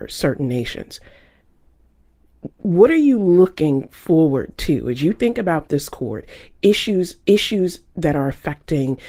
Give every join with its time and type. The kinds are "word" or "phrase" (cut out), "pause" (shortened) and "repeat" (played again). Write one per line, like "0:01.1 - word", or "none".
0:02.5 - pause
0:07.2 - repeat